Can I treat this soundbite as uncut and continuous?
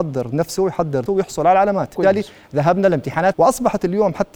no; 3 cuts; at 1.1 s, 2.0 s, 3.3 s

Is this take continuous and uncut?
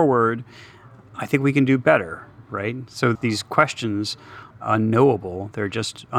no; 2 cuts; at 3.1 s, 4.5 s

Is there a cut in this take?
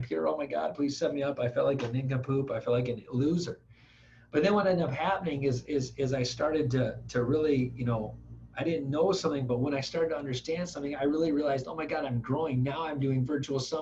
no; 0 cuts

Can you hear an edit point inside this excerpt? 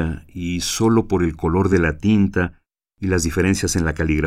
no; 0 cuts

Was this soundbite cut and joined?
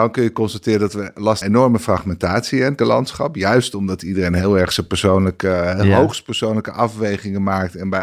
yes; 2 cuts; at 1.4 s, 2.8 s

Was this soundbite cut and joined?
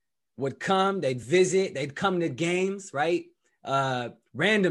no; 0 cuts

